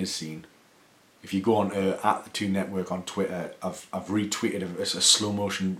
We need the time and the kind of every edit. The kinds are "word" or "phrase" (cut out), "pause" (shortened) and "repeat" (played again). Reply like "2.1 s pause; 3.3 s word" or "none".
none